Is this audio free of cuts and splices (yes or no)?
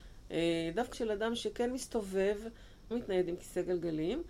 no